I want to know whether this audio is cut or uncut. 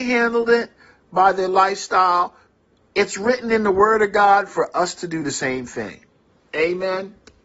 uncut